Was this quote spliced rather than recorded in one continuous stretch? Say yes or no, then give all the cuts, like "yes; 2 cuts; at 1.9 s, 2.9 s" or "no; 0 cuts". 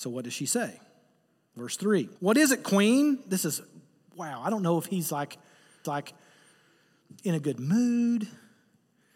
yes; 2 cuts; at 2.2 s, 5.8 s